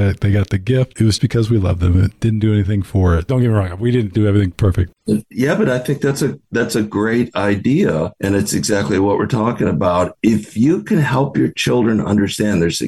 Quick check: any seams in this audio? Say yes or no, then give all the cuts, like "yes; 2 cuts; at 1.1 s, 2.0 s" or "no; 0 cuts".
yes; 1 cut; at 1.2 s